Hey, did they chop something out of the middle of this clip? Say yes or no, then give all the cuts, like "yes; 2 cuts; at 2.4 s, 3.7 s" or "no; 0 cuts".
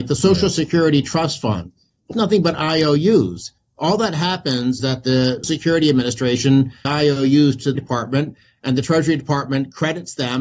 yes; 5 cuts; at 2.1 s, 4.8 s, 5.4 s, 6.8 s, 7.7 s